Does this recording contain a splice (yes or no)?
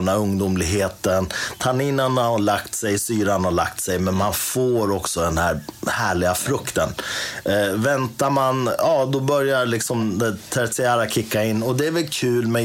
no